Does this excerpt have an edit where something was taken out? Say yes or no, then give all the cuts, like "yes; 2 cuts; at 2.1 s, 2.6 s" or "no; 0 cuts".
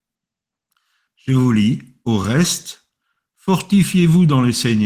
no; 0 cuts